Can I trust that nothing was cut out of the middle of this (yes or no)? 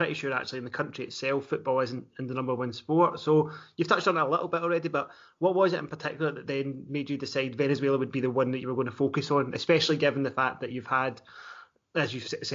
yes